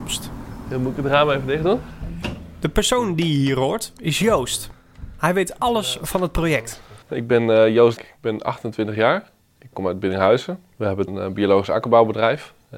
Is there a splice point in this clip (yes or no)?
yes